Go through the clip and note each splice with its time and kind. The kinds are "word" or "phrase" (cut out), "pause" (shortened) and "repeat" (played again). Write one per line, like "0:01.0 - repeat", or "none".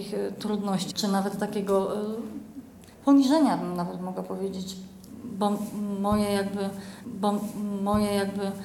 0:00.9 - word
0:02.9 - pause
0:07.0 - repeat